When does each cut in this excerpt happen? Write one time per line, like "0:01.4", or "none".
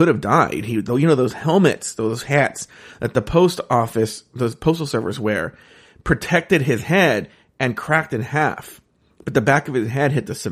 none